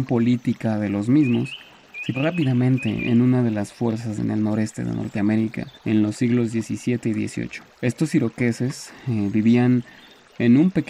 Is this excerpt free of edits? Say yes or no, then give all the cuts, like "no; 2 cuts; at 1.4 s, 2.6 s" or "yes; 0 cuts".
no; 4 cuts; at 2.1 s, 4.2 s, 5.8 s, 7.7 s